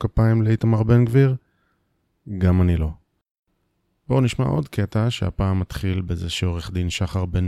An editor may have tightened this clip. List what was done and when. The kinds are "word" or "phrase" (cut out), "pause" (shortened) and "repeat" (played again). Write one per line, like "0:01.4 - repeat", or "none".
none

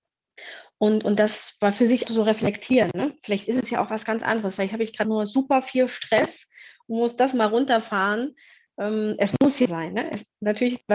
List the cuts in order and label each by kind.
0:02.0 - word
0:05.0 - word
0:09.7 - phrase

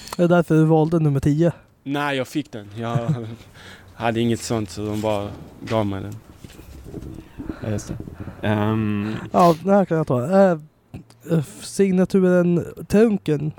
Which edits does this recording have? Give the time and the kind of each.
none

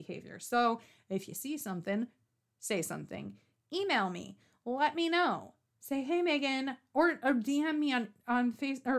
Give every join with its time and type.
none

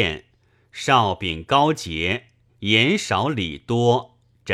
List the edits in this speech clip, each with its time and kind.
0:02.5 - phrase

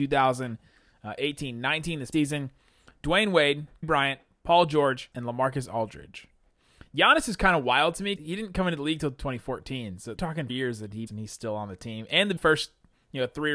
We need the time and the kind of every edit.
0:02.1 - word
0:03.8 - word
0:05.1 - word
0:08.2 - word
0:10.2 - word
0:10.5 - word
0:11.1 - word
0:12.4 - word

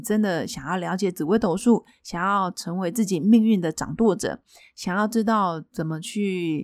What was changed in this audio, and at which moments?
none

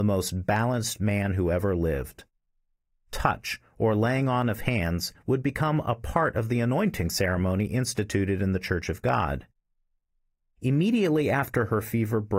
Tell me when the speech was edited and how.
none

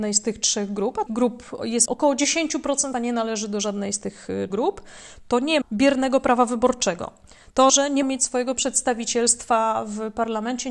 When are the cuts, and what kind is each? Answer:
0:01.1 - word
0:01.9 - word
0:02.9 - word
0:04.5 - word
0:05.6 - word
0:07.7 - word
0:08.0 - word

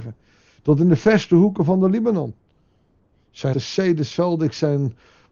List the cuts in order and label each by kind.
0:03.5 - word

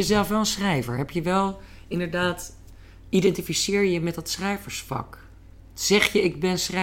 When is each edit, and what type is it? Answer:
none

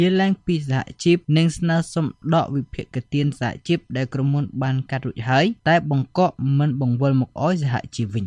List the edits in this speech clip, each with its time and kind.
none

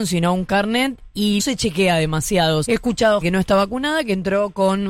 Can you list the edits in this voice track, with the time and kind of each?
0:01.4 - word
0:02.6 - word
0:03.2 - word

